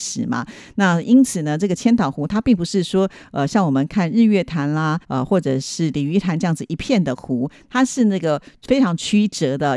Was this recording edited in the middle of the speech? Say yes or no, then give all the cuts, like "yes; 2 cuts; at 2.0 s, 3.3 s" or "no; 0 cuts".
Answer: yes; 1 cut; at 5.0 s